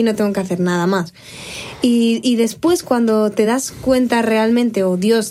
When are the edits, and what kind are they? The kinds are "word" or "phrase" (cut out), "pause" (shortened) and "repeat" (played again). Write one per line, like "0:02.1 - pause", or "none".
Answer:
none